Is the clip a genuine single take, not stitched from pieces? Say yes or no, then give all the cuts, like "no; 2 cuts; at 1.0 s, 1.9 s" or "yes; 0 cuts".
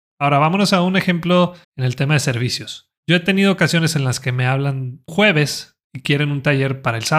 no; 4 cuts; at 1.6 s, 3.0 s, 5.1 s, 5.8 s